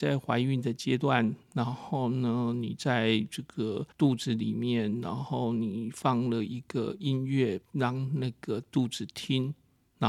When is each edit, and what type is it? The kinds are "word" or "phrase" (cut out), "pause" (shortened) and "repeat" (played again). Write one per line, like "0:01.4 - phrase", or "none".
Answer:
0:01.4 - pause
0:03.9 - pause
0:07.6 - pause